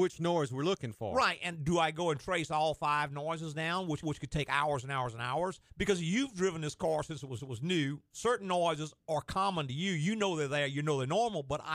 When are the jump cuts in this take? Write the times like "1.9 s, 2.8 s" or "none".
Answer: 4.0 s, 5.7 s, 7.4 s